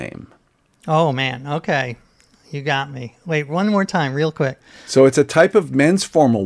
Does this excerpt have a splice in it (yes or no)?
no